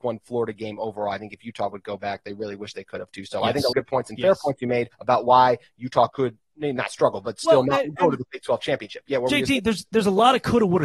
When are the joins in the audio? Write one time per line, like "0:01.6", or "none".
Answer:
0:03.7
0:04.9
0:06.1